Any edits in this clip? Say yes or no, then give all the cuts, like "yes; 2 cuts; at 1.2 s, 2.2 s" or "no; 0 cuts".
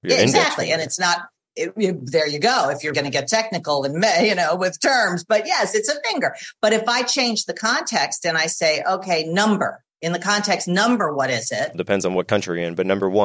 yes; 2 cuts; at 2.9 s, 11.7 s